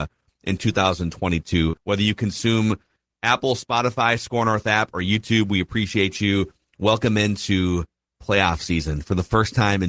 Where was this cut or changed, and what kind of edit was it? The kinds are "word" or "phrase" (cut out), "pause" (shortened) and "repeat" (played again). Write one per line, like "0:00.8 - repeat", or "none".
0:01.8 - pause